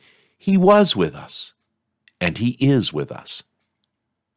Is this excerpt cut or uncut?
uncut